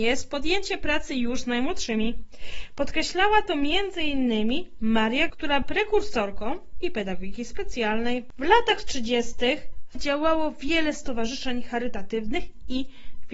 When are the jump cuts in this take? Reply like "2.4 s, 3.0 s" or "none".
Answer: 5.3 s, 5.6 s, 6.8 s, 9.9 s